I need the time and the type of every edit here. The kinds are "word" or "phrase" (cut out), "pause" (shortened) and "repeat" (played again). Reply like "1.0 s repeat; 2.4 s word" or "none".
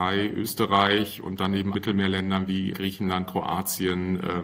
1.7 s word; 2.7 s word